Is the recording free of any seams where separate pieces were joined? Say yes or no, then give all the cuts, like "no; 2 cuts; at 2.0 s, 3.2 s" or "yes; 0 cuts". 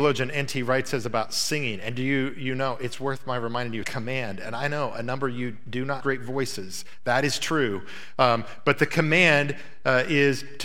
no; 2 cuts; at 3.8 s, 6.0 s